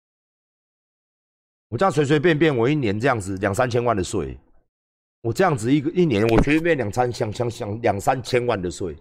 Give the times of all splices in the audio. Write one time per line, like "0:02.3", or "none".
0:04.7